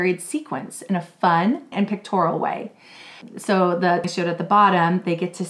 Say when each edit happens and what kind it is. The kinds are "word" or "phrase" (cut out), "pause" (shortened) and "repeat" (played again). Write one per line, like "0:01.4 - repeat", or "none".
0:01.7 - word
0:04.0 - word